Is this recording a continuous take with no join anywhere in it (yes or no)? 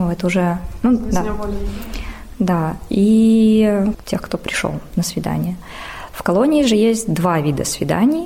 yes